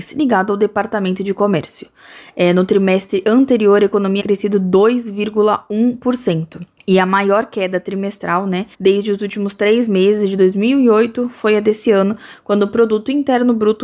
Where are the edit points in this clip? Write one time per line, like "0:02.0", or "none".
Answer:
0:04.2
0:06.8
0:08.7

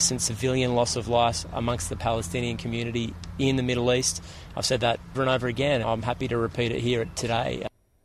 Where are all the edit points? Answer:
0:05.1
0:05.8

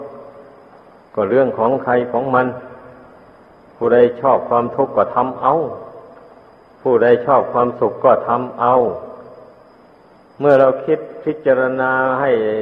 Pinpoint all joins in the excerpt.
none

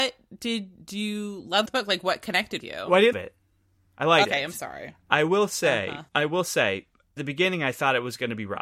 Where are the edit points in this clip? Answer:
0:01.7
0:02.6
0:03.1
0:04.2
0:06.1
0:07.2

